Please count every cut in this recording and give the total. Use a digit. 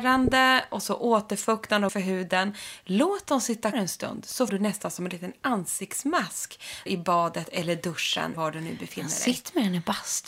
5